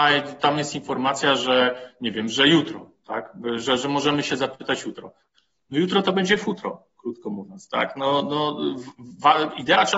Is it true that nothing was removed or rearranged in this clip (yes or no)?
yes